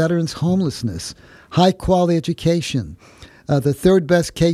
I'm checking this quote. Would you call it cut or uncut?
uncut